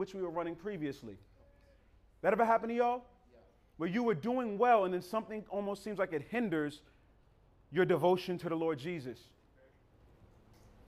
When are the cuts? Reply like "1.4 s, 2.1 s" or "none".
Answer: none

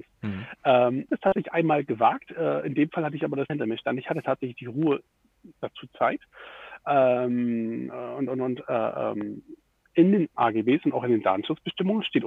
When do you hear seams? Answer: 1.1 s, 3.5 s, 10.3 s

